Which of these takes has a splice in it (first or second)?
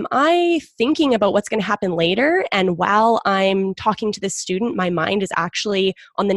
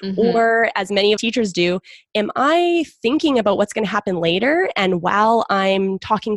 second